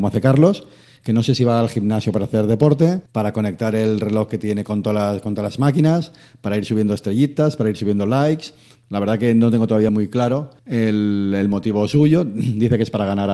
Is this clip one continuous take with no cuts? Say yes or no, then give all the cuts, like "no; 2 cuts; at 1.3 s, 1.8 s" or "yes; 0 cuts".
no; 3 cuts; at 3.1 s, 9.9 s, 10.6 s